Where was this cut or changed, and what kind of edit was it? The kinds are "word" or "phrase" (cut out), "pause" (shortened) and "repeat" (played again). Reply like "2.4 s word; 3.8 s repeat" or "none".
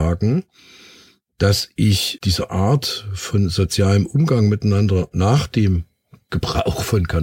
2.2 s word